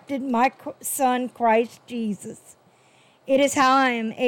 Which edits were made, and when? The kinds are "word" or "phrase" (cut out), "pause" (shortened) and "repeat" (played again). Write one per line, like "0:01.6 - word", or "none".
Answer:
none